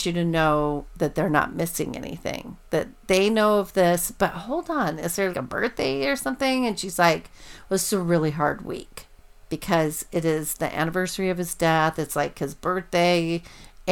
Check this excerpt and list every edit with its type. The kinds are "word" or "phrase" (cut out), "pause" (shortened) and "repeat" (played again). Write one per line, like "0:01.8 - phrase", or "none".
0:05.3 - word